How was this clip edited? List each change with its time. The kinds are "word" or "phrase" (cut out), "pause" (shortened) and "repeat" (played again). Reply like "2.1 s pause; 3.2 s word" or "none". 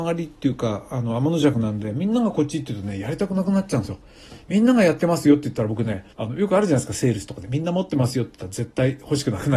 6.1 s pause